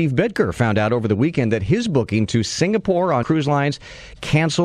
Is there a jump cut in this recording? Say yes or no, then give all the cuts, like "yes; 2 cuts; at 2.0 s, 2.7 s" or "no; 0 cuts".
yes; 1 cut; at 3.2 s